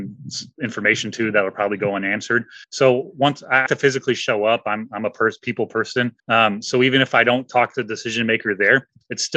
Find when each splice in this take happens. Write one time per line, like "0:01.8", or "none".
0:02.6
0:03.7
0:06.2